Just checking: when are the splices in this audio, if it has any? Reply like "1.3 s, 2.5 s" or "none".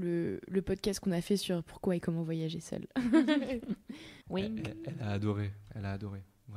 4.2 s